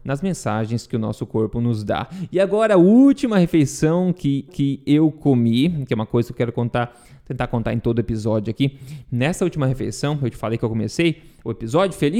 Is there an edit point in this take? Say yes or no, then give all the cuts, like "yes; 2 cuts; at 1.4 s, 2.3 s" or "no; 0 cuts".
yes; 1 cut; at 4.5 s